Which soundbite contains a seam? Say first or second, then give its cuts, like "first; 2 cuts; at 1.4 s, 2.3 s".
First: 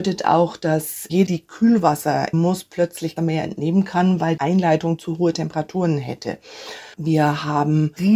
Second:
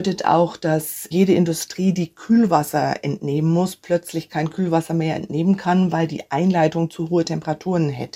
first; 5 cuts; at 1.3 s, 2.3 s, 3.2 s, 4.4 s, 6.9 s